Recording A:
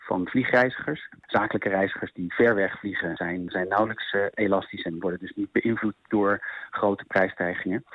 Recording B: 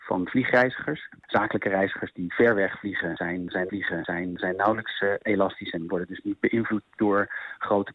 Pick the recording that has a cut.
B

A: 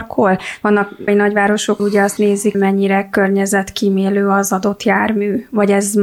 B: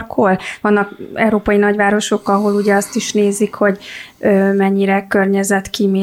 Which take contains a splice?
A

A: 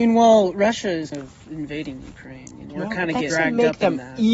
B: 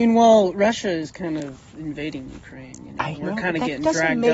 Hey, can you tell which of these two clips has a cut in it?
A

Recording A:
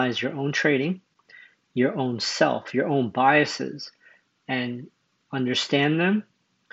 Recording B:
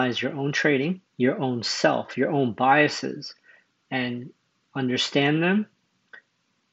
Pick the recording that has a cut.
B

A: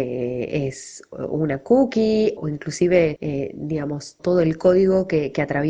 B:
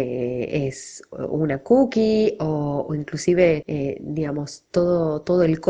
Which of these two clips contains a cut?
A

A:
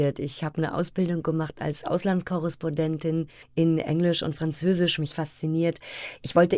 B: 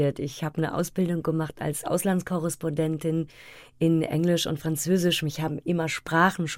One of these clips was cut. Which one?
A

